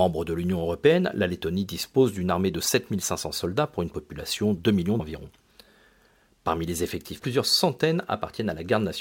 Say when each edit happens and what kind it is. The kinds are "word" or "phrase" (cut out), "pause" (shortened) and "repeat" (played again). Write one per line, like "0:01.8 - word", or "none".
0:04.6 - word
0:05.0 - word
0:07.2 - word